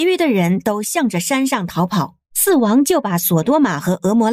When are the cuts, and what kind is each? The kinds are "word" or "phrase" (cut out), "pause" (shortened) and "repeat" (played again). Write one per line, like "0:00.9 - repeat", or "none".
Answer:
0:02.2 - pause